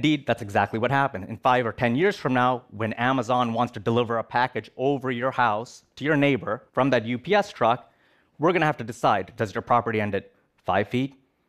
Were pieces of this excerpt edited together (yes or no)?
yes